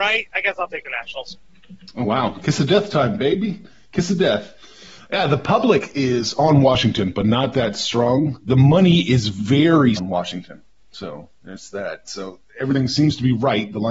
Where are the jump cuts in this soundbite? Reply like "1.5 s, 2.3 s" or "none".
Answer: 10.0 s

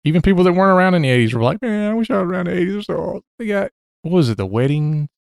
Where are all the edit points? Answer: 3.3 s

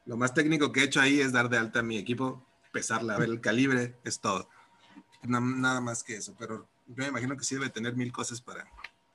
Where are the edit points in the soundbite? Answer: 3.2 s, 5.2 s

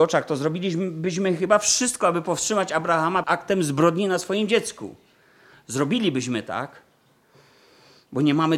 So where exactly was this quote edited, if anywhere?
3.2 s

